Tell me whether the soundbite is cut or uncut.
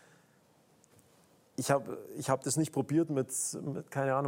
uncut